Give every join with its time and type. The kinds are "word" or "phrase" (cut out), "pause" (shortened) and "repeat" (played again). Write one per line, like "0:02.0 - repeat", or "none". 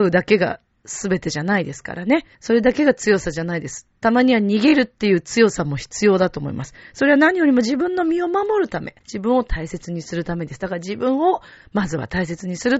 0:02.3 - pause
0:09.0 - pause